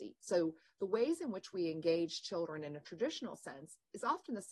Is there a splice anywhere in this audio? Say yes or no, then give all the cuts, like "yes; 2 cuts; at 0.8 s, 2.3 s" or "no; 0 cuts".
no; 0 cuts